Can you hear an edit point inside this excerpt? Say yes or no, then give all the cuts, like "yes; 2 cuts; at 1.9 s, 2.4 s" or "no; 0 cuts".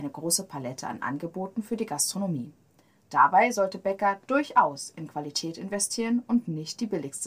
no; 0 cuts